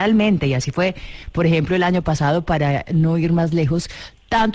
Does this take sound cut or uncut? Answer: uncut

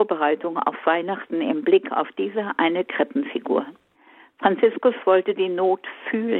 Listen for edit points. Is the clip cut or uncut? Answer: cut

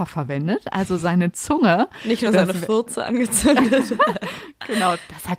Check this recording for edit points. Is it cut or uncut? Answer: uncut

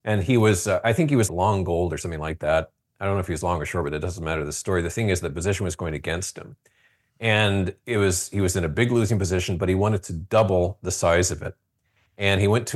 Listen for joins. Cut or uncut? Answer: cut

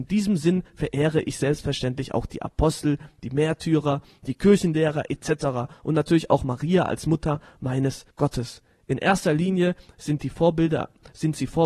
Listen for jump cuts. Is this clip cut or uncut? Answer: cut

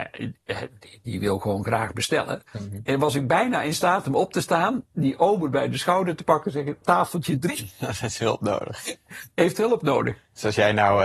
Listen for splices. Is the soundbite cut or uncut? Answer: cut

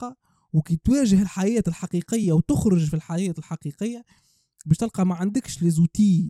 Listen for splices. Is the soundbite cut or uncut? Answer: uncut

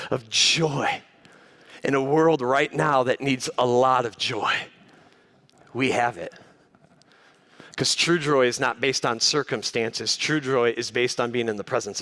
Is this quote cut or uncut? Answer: uncut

